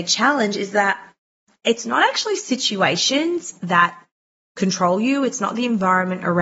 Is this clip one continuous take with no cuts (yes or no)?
yes